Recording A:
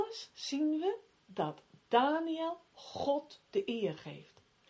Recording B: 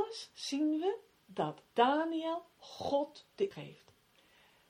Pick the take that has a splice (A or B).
B